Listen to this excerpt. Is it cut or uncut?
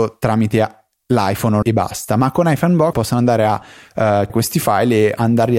cut